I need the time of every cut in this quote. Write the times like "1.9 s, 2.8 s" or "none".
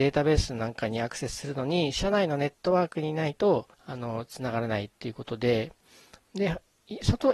3.7 s